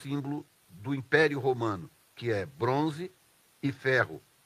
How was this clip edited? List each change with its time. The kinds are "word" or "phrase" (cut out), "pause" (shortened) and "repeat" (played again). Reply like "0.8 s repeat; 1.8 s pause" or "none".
none